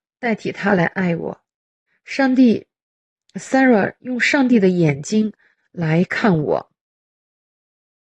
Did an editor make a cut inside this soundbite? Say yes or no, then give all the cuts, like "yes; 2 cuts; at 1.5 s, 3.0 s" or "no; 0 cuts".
no; 0 cuts